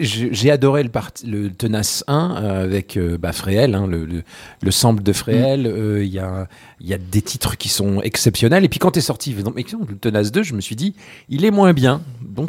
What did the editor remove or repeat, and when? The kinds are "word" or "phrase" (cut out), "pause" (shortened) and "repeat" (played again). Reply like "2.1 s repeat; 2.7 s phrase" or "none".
none